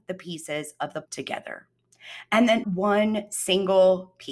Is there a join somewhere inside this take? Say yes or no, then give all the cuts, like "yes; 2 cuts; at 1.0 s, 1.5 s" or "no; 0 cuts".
yes; 2 cuts; at 1.0 s, 2.6 s